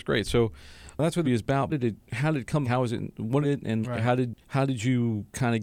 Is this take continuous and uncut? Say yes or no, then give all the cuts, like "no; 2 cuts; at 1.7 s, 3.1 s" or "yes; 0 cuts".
no; 7 cuts; at 1.2 s, 1.7 s, 2.0 s, 2.6 s, 3.4 s, 3.8 s, 4.4 s